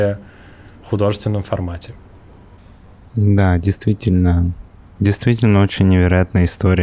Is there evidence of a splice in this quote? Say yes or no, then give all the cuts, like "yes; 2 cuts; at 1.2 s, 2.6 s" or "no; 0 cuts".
no; 0 cuts